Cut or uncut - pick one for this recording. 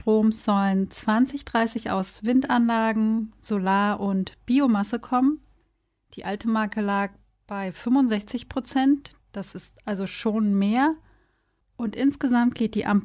uncut